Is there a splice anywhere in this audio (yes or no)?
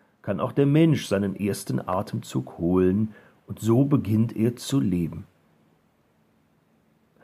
no